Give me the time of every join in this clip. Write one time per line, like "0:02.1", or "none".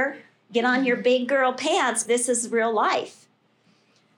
0:02.1